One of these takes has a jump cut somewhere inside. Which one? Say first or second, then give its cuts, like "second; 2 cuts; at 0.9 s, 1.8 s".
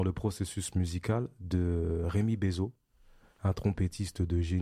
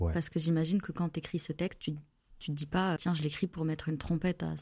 second; 1 cut; at 3.0 s